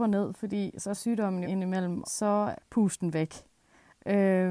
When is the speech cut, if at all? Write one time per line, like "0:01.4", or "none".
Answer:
0:01.0
0:01.4
0:02.0
0:02.6